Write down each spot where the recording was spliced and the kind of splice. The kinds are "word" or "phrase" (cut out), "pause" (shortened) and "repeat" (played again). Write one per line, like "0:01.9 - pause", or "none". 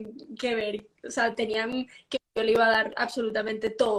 0:02.1 - word

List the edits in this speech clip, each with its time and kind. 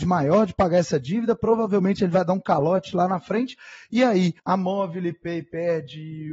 0:04.4 - pause

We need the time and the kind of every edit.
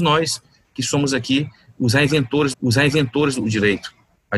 0:02.5 - repeat

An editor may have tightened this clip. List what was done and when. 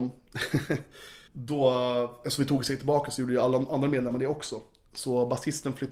0:01.3 - pause

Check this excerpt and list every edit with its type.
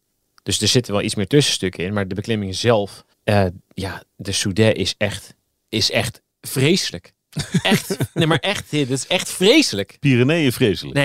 0:03.1 - pause
0:05.4 - pause
0:06.3 - pause

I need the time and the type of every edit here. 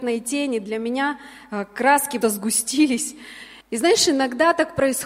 0:02.2 - word
0:03.6 - pause

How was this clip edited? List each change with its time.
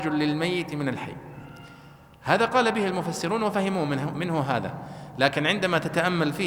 none

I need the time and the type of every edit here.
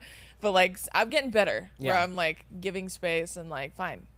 none

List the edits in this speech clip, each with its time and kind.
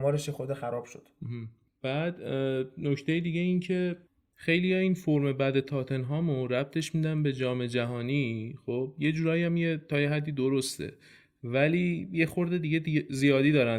none

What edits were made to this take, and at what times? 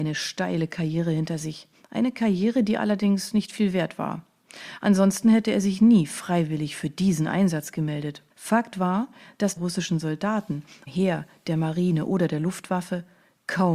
0:01.7 - pause
0:08.3 - pause
0:09.6 - phrase
0:10.9 - phrase

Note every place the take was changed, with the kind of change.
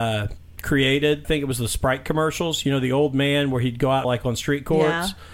0:01.2 - phrase
0:04.0 - phrase

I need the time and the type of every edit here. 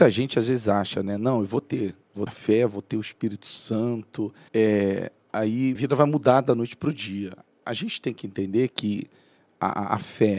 0:02.3 - word
0:04.5 - pause
0:05.7 - word

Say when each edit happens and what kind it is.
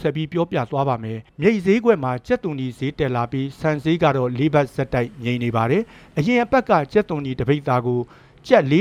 0:01.3 - pause

